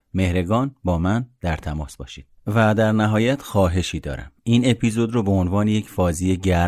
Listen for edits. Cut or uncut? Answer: uncut